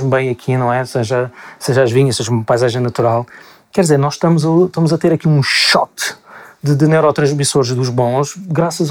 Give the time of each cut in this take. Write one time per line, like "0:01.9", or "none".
none